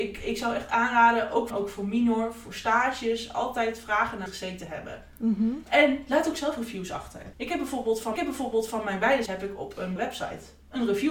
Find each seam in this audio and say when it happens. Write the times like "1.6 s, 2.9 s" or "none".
1.5 s, 4.3 s, 7.3 s, 8.2 s, 9.3 s, 10.0 s

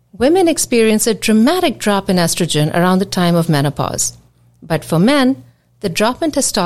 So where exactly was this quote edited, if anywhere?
none

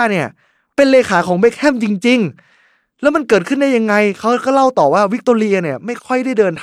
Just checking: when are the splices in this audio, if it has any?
none

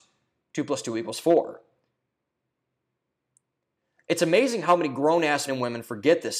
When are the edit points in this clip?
5.5 s

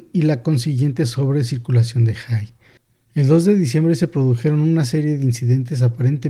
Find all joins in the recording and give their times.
none

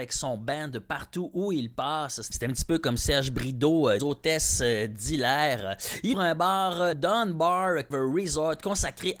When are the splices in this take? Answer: 4.0 s, 6.1 s, 6.9 s, 7.9 s

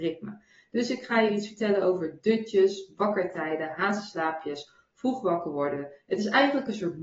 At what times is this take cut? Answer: none

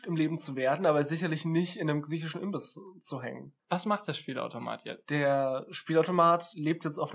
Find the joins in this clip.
none

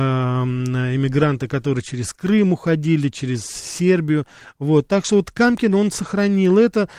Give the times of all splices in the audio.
none

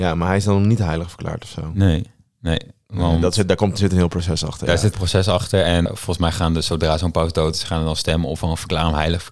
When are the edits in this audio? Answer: 4.9 s, 5.9 s

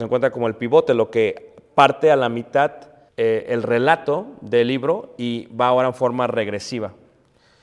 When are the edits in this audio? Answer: 3.1 s

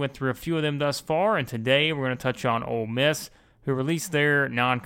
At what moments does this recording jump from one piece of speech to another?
none

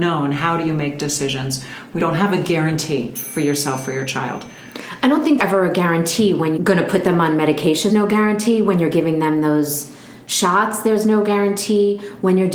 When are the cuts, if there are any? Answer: 2.0 s, 5.4 s, 6.6 s, 7.9 s

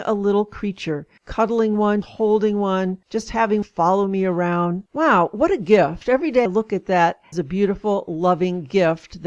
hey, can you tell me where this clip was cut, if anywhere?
1.2 s, 2.0 s, 3.0 s, 3.6 s, 4.9 s, 6.5 s, 7.3 s

